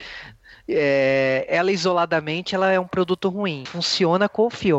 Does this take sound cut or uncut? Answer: cut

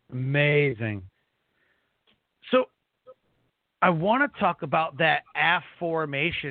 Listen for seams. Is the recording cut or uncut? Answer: uncut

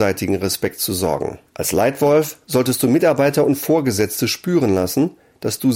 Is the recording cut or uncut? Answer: cut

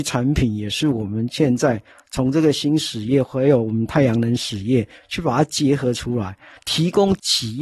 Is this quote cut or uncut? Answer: uncut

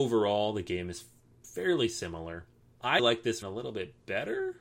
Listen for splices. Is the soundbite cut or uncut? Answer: cut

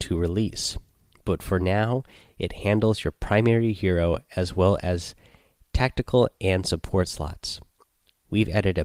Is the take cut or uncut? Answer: uncut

